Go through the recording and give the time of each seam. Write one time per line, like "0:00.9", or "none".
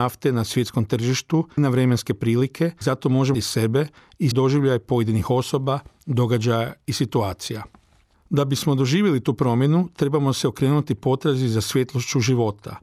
0:01.6
0:02.8
0:03.3
0:04.3